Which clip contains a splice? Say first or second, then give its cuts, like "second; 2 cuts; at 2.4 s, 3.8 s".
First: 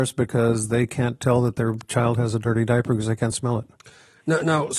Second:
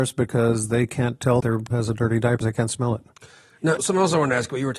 second; 4 cuts; at 1.4 s, 1.7 s, 2.4 s, 3.8 s